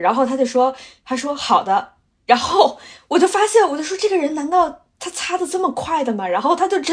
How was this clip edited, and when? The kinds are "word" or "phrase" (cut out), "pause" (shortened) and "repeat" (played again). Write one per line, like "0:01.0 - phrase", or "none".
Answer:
none